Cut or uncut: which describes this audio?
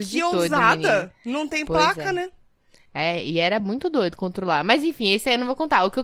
uncut